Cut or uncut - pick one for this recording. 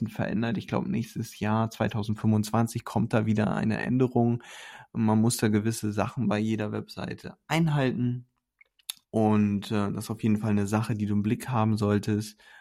cut